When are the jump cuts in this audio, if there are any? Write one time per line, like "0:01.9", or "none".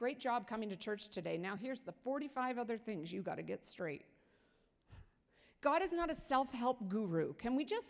none